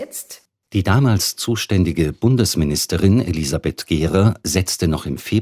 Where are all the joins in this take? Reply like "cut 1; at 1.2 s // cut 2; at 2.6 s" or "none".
none